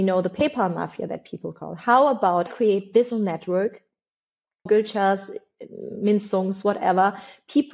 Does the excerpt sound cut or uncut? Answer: cut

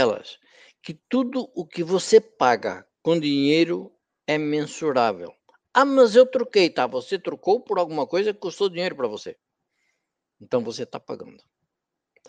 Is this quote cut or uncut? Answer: uncut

